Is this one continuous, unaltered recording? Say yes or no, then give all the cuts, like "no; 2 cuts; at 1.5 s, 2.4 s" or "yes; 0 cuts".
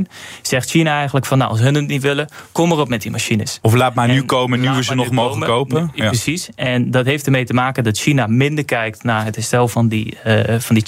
yes; 0 cuts